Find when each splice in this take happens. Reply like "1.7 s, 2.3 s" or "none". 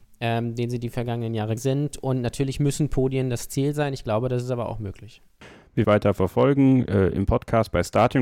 1.6 s, 5.8 s

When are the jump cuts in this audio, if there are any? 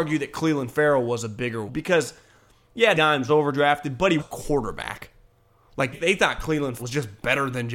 1.7 s, 2.9 s, 3.3 s, 4.2 s, 5.9 s, 6.8 s

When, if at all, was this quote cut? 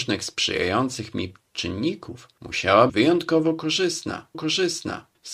2.9 s, 4.3 s

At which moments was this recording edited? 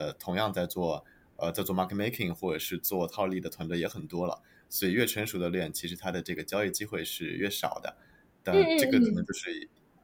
none

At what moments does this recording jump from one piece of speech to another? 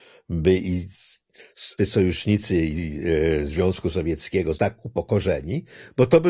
1.8 s, 4.5 s

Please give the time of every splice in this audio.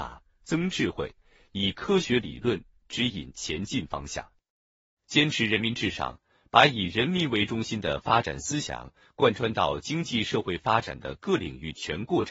none

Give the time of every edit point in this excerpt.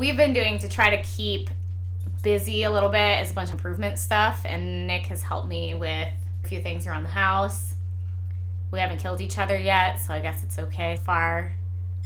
3.5 s, 6.4 s, 11.0 s

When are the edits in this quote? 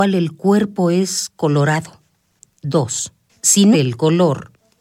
3.7 s

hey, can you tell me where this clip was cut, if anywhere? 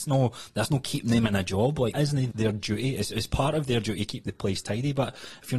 1.9 s, 2.3 s

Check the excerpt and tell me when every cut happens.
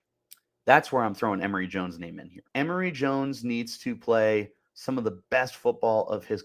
2.5 s

